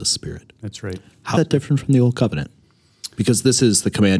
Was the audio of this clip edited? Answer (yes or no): yes